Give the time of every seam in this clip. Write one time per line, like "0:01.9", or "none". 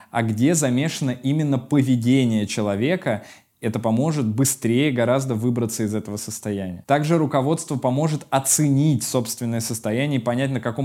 none